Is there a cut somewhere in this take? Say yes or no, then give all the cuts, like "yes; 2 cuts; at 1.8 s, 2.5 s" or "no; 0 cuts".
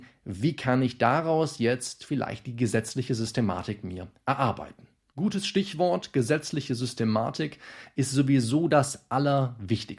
no; 0 cuts